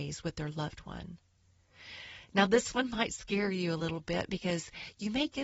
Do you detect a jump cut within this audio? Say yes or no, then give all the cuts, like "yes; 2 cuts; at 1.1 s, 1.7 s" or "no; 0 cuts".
no; 0 cuts